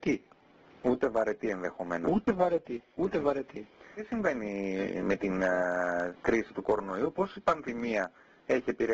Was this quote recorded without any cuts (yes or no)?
yes